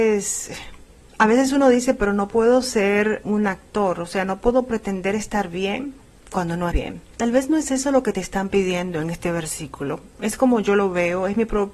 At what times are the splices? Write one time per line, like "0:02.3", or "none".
0:03.2
0:06.7